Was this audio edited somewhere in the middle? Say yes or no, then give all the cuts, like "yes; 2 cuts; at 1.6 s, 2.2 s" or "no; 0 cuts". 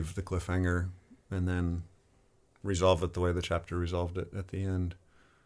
no; 0 cuts